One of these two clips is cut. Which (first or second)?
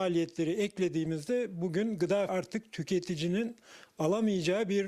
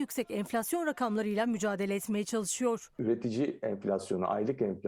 first